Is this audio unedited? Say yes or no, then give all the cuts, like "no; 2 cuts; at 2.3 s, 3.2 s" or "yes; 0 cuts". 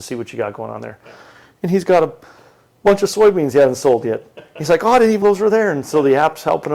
no; 1 cut; at 5.2 s